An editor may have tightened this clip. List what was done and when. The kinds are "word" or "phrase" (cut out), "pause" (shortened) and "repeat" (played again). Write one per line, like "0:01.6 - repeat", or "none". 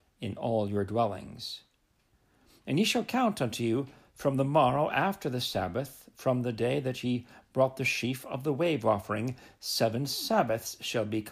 none